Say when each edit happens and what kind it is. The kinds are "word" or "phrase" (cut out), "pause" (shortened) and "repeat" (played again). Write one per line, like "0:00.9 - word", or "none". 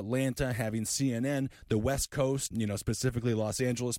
0:02.5 - word

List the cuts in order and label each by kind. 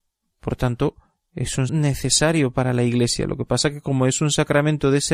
0:01.7 - word

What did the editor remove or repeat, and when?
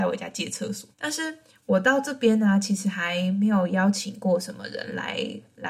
0:00.9 - pause

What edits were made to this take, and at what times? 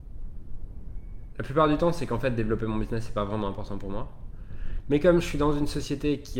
none

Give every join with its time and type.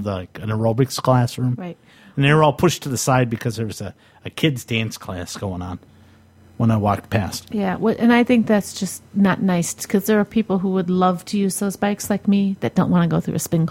none

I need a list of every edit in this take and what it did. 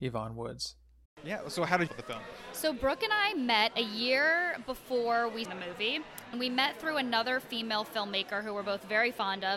0:01.1 - pause
0:01.9 - phrase
0:05.5 - phrase
0:06.3 - word

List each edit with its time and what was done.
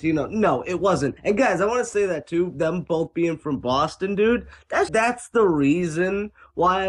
0:01.2 - pause
0:04.9 - word

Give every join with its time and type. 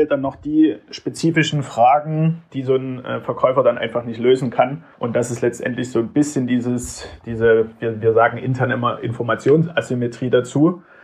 0:04.9 - pause

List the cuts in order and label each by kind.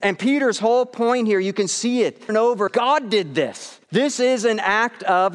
0:02.3 - word
0:02.7 - word
0:03.8 - pause

